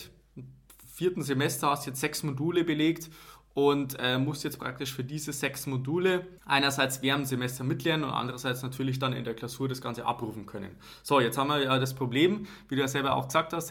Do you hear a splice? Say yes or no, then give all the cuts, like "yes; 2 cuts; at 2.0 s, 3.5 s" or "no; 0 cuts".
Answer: yes; 1 cut; at 6.4 s